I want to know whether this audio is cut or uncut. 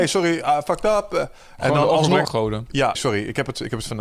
cut